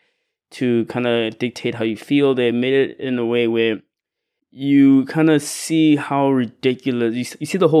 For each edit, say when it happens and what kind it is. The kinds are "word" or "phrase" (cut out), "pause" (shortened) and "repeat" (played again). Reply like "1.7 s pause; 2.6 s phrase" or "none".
none

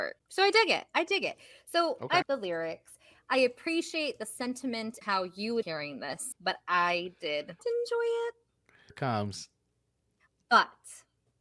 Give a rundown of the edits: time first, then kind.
2.2 s word; 5.0 s word; 5.6 s word; 6.3 s word; 7.6 s word; 8.9 s word

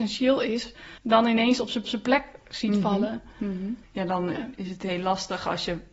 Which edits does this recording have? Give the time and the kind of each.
1.0 s pause; 1.8 s repeat; 3.8 s pause

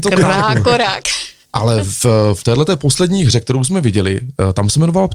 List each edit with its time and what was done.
none

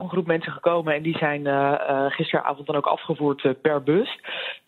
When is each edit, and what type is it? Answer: none

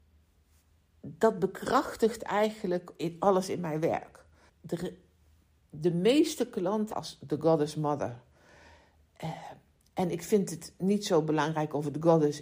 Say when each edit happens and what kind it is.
3.0 s word; 4.5 s pause; 6.9 s phrase

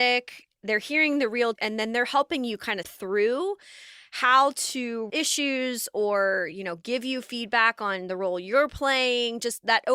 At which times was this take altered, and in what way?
1.5 s word; 2.8 s word; 5.1 s word

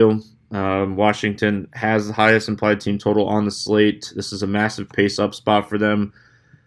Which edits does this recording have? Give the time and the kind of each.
none

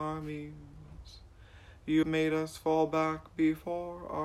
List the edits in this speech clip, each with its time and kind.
2.0 s word

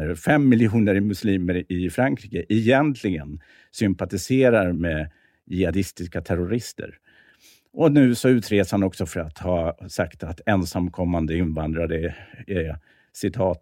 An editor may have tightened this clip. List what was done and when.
none

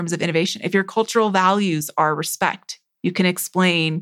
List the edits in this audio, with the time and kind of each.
none

